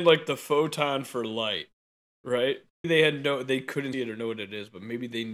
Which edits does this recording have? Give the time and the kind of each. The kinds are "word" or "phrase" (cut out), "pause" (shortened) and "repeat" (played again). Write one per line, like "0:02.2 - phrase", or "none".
0:02.8 - word
0:03.9 - word